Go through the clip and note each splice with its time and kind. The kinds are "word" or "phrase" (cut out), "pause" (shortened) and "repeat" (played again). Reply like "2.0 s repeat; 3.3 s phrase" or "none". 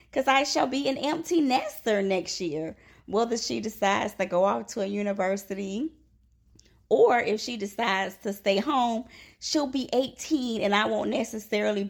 none